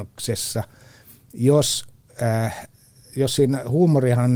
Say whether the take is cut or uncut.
uncut